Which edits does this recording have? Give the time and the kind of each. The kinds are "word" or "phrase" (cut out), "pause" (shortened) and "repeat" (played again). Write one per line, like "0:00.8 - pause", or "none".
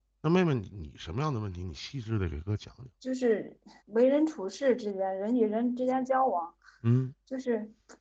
0:02.9 - pause
0:03.8 - pause